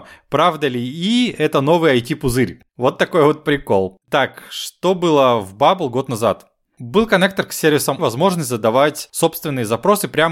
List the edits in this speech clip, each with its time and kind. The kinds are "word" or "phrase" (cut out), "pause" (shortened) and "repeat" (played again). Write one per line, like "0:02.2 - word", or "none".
0:02.7 - pause
0:04.0 - pause
0:08.0 - phrase